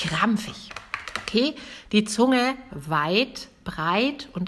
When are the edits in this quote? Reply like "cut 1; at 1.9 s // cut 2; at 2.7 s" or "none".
cut 1; at 2.7 s